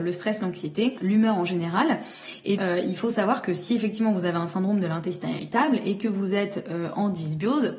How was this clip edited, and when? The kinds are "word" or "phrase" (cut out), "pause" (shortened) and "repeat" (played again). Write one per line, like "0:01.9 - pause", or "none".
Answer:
0:02.6 - word